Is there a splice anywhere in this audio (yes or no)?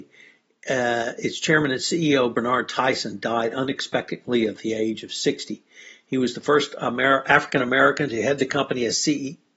no